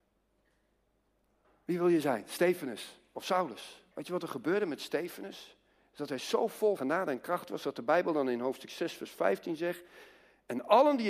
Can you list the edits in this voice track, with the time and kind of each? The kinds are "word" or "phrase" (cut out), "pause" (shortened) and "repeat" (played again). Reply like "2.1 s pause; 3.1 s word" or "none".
3.9 s pause; 6.8 s word

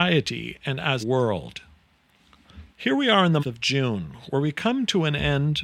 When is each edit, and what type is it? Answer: 1.0 s word; 2.7 s pause; 3.4 s word

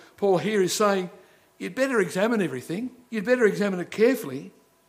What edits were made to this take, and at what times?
3.1 s pause

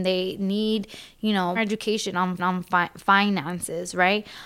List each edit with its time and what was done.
1.6 s word; 2.4 s repeat

